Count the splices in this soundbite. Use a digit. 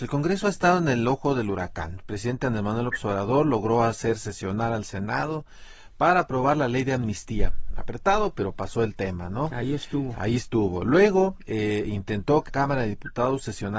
1